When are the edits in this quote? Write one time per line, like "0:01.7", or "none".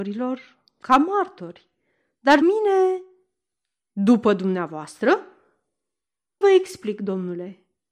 0:02.4
0:06.4